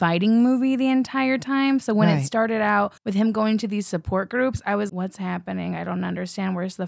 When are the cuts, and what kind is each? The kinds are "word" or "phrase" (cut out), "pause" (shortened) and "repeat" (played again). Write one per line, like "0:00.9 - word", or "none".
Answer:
0:03.0 - pause
0:04.9 - word